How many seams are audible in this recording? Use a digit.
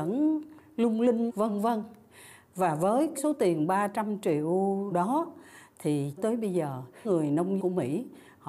6